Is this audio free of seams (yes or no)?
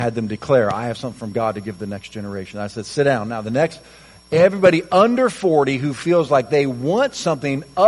yes